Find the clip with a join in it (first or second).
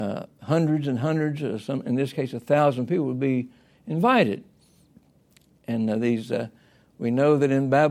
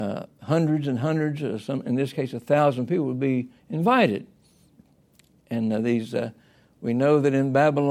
second